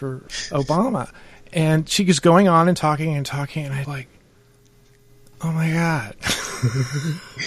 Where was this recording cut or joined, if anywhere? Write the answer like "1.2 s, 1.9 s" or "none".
3.8 s